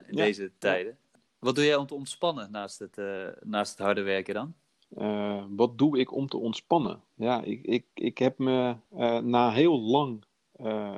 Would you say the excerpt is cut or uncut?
cut